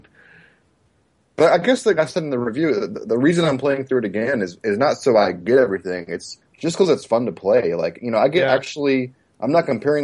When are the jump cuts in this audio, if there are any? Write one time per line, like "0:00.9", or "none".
0:02.0
0:06.5